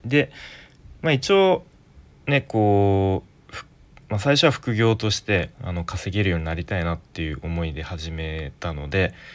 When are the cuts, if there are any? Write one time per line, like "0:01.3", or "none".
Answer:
0:02.1
0:05.5